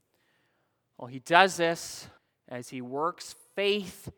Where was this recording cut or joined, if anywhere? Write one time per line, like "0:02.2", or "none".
0:02.2